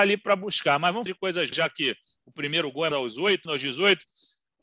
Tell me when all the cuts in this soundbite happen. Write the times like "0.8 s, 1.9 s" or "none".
1.1 s, 1.5 s, 2.9 s, 3.4 s